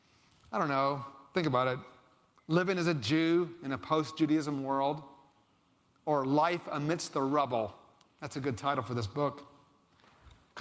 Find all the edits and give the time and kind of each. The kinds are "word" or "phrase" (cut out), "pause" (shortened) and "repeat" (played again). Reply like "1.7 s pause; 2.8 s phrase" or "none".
8.0 s pause